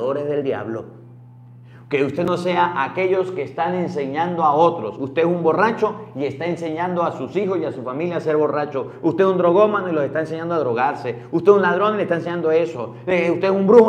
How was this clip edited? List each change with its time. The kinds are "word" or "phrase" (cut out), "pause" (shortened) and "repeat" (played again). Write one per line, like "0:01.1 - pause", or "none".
none